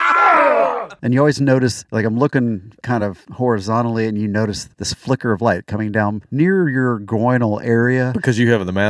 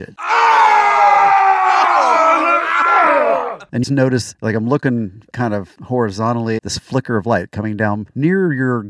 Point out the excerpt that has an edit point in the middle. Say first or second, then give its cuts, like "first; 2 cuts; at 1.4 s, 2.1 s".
second; 2 cuts; at 3.8 s, 6.6 s